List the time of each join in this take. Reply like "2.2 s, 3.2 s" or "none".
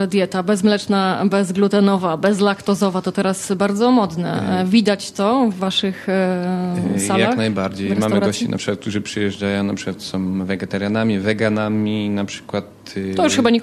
none